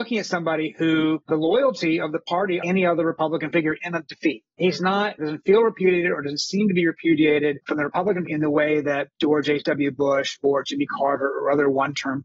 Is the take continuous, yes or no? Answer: no